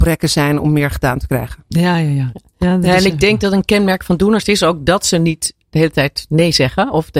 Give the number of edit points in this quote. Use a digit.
0